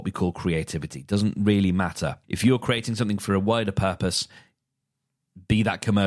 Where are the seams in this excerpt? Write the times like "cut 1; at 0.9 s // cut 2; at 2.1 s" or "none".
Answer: cut 1; at 2.2 s